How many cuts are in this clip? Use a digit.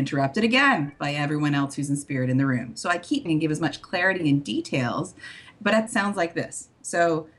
2